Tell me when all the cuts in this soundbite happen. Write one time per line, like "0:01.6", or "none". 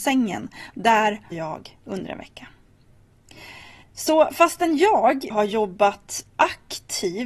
0:01.3
0:03.8
0:05.3
0:06.3